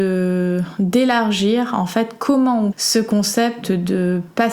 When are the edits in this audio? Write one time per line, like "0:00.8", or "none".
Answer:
0:02.7